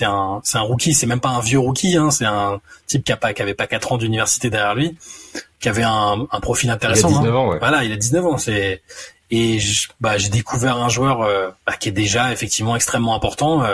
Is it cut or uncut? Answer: cut